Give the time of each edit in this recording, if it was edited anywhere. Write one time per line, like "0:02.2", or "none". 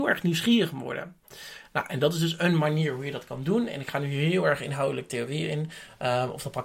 none